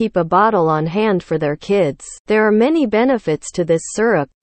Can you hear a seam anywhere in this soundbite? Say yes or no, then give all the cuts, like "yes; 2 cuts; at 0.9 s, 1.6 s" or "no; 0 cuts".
yes; 1 cut; at 2.2 s